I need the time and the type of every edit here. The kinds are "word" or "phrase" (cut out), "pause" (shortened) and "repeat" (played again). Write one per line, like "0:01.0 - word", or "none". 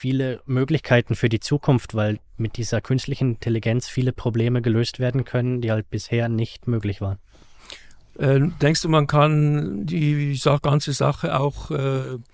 none